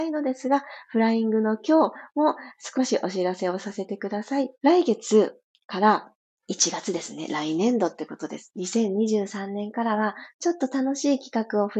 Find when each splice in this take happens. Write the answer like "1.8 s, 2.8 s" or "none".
4.5 s, 6.2 s